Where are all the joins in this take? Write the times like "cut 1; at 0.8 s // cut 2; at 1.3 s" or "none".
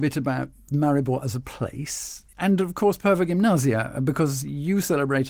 none